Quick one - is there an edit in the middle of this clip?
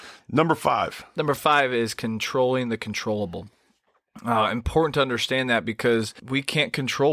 no; 0 cuts

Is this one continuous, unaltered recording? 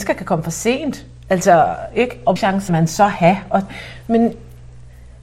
no; 2 cuts; at 2.4 s, 2.7 s

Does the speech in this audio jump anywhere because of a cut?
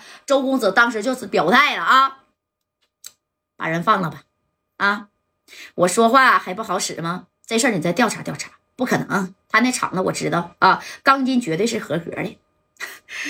yes; 1 cut; at 9.4 s

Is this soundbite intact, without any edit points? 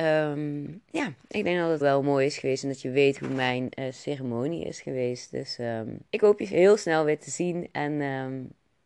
no; 2 cuts; at 1.8 s, 6.1 s

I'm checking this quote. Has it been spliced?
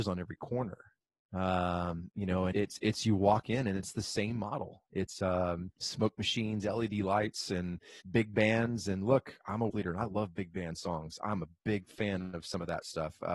yes; 5 cuts; at 1.0 s, 2.5 s, 5.8 s, 8.0 s, 9.7 s

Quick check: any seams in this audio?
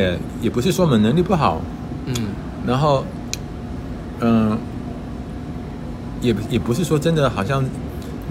no; 0 cuts

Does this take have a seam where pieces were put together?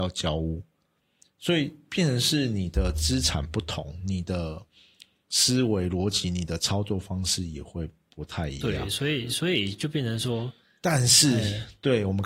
no; 0 cuts

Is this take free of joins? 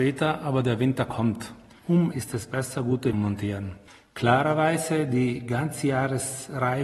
no; 2 cuts; at 2.1 s, 3.1 s

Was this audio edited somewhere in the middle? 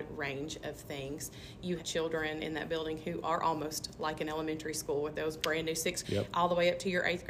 yes; 2 cuts; at 1.8 s, 6.0 s

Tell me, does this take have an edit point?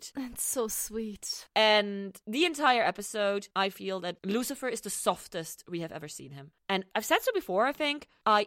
no; 0 cuts

